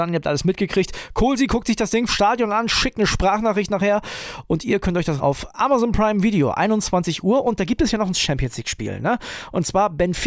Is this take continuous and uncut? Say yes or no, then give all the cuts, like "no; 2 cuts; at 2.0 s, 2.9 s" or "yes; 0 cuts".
no; 3 cuts; at 2.1 s, 5.2 s, 8.1 s